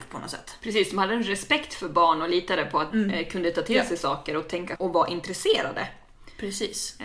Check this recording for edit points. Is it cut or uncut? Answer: cut